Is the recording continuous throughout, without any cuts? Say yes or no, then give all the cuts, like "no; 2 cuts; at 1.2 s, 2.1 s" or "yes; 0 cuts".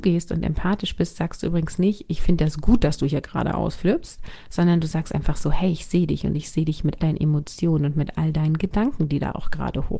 no; 1 cut; at 7.0 s